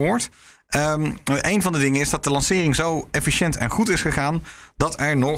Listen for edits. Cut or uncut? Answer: uncut